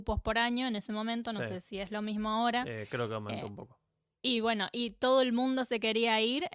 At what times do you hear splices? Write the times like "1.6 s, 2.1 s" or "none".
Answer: none